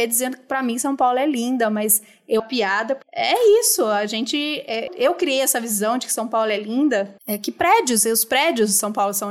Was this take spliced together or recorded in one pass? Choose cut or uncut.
cut